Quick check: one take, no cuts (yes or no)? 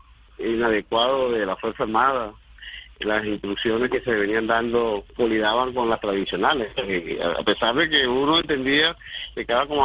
no